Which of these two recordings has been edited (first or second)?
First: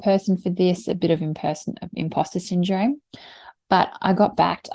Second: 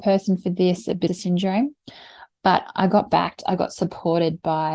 second